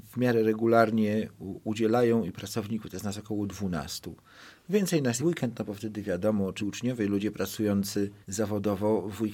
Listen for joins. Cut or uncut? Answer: cut